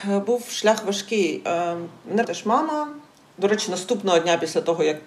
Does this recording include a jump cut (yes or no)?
yes